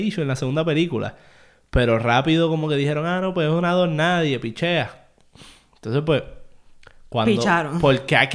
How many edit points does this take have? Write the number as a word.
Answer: zero